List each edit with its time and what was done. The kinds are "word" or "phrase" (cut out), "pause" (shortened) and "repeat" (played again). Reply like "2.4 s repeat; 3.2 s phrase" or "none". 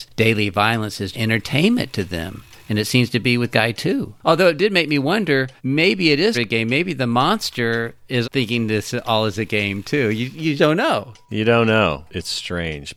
1.1 s word; 3.5 s word; 5.6 s pause; 6.3 s word; 8.2 s word; 10.6 s word